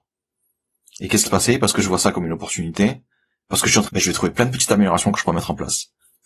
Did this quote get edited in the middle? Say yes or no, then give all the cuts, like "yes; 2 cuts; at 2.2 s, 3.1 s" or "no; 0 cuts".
yes; 2 cuts; at 1.3 s, 3.9 s